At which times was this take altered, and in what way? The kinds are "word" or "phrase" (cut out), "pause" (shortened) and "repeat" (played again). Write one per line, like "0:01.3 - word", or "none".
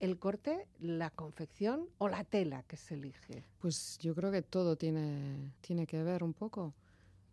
0:01.9 - pause
0:05.6 - pause